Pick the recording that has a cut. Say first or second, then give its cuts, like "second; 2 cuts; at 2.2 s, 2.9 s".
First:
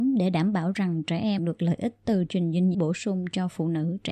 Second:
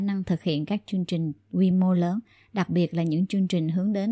first; 3 cuts; at 1.4 s, 2.3 s, 2.7 s